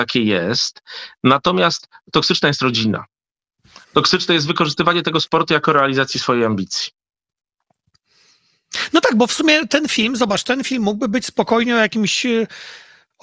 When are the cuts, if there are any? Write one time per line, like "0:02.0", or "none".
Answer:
0:03.8